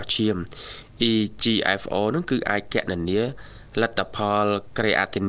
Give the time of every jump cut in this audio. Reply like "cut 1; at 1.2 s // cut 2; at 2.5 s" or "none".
none